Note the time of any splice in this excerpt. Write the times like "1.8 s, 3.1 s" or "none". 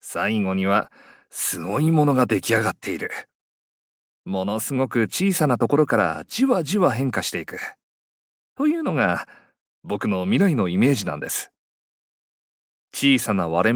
none